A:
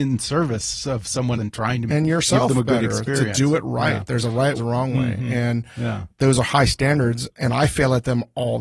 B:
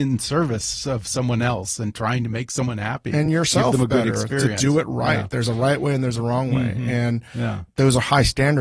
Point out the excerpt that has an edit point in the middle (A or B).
A